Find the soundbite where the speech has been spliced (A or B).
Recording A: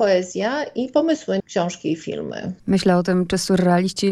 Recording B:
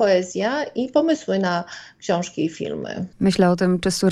A